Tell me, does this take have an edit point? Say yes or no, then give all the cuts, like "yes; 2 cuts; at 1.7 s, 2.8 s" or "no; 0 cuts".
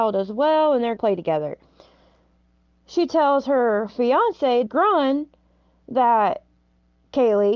yes; 3 cuts; at 1.0 s, 3.9 s, 4.7 s